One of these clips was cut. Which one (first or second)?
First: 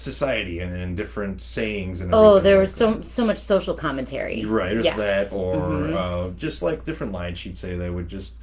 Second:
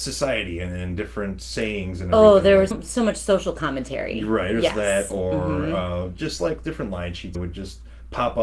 second